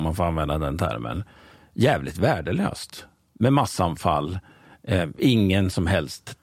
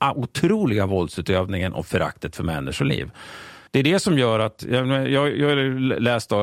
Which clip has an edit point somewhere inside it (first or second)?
second